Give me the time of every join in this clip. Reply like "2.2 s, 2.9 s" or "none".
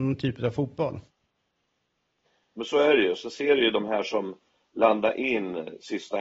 none